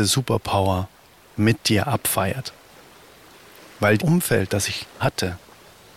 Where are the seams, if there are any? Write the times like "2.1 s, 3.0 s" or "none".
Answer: 1.4 s, 4.0 s, 5.0 s